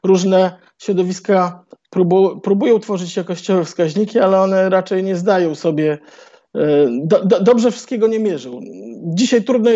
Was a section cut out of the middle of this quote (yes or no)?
no